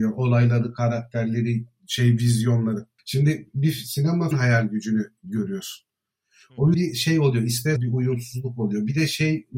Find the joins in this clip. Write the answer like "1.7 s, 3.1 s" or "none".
3.0 s, 4.3 s, 5.2 s, 6.7 s, 7.8 s